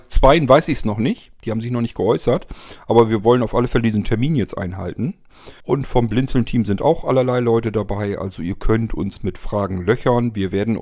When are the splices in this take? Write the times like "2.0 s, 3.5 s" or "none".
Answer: 5.6 s

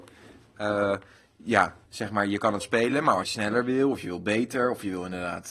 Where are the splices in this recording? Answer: 1.9 s, 2.6 s, 3.2 s

